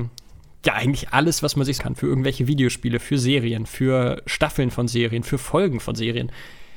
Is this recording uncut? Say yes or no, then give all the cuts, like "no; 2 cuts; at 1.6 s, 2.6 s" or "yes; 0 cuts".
no; 2 cuts; at 1.1 s, 1.8 s